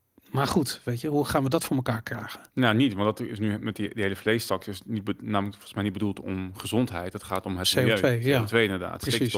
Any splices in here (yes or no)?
no